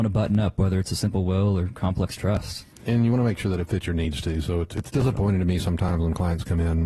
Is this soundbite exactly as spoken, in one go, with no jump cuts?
yes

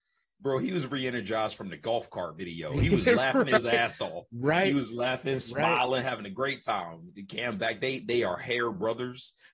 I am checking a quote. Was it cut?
no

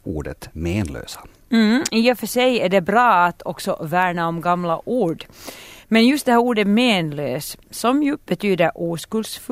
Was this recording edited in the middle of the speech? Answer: no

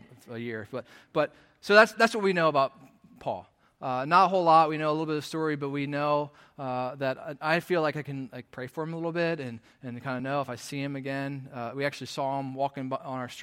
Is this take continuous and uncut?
yes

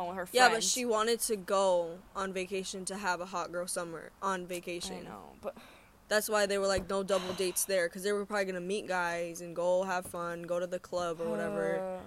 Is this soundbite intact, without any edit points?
yes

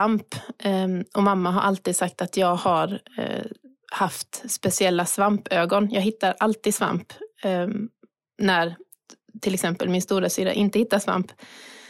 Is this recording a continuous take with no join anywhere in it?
yes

